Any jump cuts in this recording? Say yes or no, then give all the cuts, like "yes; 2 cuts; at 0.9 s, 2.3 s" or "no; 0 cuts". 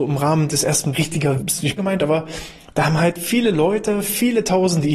yes; 3 cuts; at 0.9 s, 1.4 s, 1.8 s